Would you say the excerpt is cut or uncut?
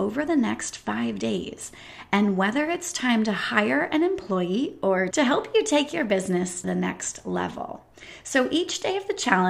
cut